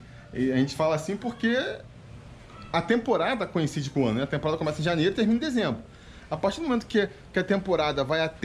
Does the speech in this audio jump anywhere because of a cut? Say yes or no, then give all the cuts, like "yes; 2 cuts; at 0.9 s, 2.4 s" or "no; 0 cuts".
no; 0 cuts